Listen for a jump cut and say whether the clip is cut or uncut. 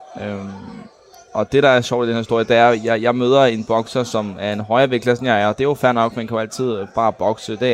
uncut